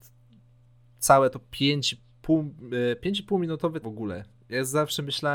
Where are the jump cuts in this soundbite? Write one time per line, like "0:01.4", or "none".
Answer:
0:03.8